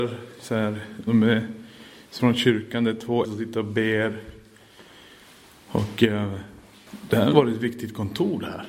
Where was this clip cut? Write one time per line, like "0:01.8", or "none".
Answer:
0:01.1
0:02.2
0:03.2
0:07.3